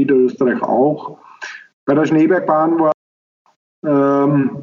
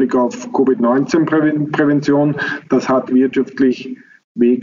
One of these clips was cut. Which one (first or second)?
second